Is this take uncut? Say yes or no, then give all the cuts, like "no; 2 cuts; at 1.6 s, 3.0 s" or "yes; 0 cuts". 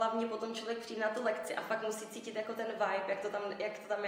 yes; 0 cuts